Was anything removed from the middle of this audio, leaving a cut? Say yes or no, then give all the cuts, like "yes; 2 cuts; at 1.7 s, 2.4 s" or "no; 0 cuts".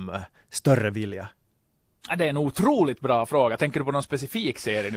no; 0 cuts